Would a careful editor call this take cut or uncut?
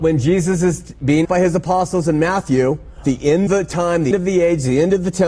cut